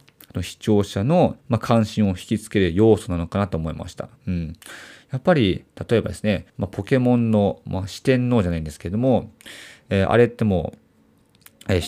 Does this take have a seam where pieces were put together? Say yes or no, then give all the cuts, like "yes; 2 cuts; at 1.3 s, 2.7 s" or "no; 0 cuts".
yes; 3 cuts; at 1.4 s, 4.2 s, 6.5 s